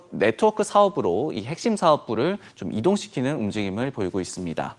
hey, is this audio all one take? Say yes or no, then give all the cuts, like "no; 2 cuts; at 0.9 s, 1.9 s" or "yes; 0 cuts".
yes; 0 cuts